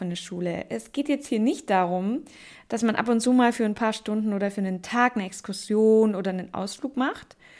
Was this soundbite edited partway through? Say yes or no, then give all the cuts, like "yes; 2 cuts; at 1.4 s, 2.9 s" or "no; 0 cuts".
no; 0 cuts